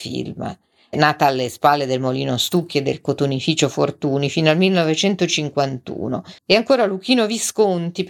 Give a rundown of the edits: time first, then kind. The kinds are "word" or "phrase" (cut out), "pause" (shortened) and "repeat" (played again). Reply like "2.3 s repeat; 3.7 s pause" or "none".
6.4 s pause